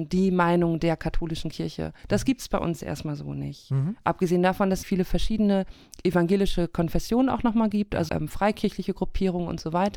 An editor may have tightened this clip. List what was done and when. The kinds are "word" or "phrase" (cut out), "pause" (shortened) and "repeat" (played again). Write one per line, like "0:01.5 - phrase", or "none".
0:02.0 - pause
0:04.8 - word
0:08.1 - word